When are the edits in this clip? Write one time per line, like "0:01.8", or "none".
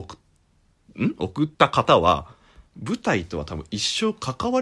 0:01.5